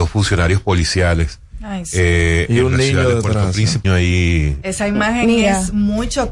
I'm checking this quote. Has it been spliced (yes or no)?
yes